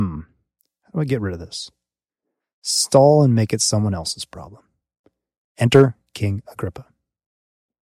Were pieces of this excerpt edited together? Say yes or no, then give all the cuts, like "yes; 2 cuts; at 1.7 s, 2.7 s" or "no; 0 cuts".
no; 0 cuts